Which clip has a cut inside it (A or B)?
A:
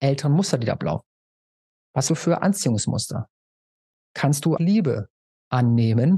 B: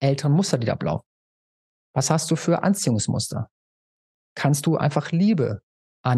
A